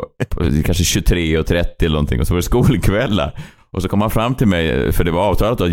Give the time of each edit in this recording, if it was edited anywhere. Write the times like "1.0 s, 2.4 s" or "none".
none